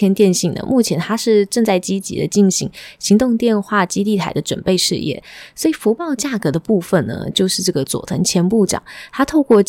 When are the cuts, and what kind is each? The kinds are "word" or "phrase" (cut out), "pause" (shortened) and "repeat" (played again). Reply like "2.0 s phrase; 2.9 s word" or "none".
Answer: none